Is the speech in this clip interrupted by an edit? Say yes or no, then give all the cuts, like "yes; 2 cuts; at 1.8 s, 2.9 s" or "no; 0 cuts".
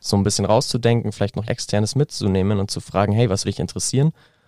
yes; 2 cuts; at 1.4 s, 3.4 s